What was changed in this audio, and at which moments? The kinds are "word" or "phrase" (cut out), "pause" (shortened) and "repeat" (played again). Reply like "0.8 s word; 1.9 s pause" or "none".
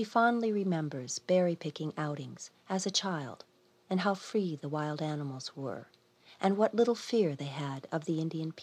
none